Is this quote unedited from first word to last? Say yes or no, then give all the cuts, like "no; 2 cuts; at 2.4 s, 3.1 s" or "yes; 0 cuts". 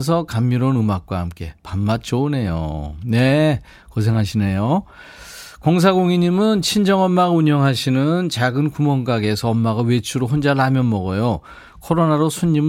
yes; 0 cuts